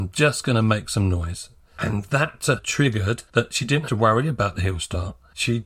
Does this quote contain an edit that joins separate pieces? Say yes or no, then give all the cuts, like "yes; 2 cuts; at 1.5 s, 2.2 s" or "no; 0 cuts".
yes; 3 cuts; at 2.6 s, 3.3 s, 3.9 s